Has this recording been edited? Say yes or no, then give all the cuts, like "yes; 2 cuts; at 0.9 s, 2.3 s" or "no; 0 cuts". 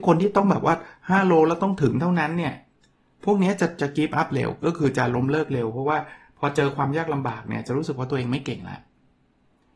no; 0 cuts